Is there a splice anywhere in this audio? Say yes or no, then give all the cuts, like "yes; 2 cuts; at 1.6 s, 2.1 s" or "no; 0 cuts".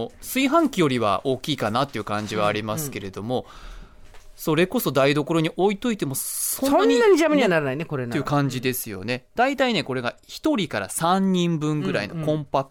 no; 0 cuts